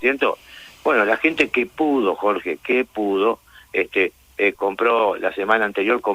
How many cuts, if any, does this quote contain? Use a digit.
1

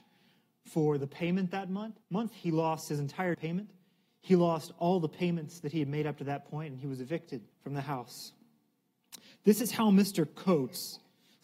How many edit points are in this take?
3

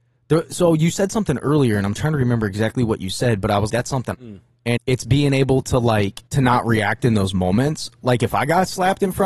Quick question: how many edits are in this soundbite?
4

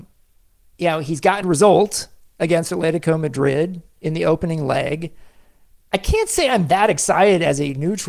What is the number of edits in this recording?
1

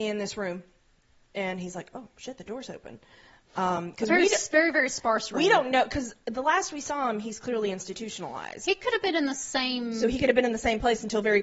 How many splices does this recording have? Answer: 0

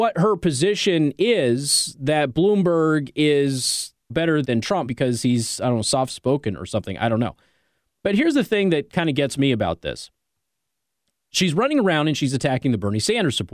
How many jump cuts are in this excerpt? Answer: 3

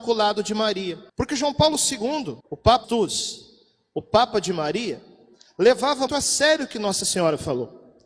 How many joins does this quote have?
4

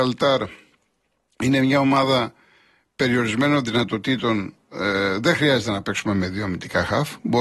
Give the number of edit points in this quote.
0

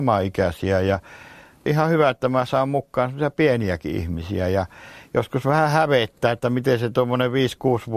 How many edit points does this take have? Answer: 0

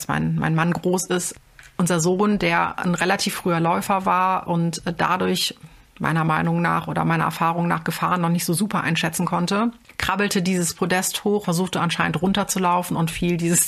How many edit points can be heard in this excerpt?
1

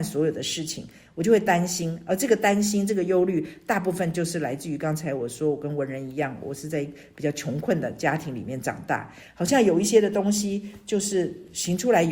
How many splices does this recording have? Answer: 0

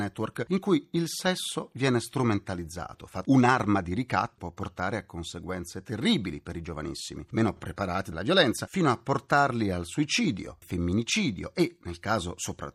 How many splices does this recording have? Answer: 4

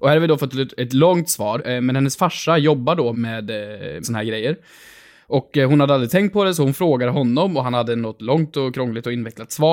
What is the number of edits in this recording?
3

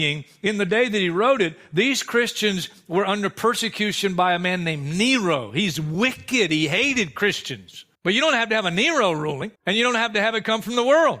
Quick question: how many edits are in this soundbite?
2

